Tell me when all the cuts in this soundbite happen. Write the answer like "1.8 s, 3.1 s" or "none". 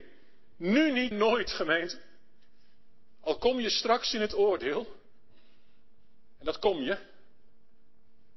1.1 s